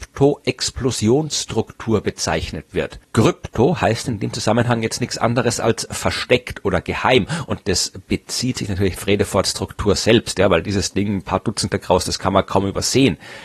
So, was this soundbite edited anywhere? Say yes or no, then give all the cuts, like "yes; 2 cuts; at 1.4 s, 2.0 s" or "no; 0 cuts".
yes; 3 cuts; at 3.0 s, 9.0 s, 11.7 s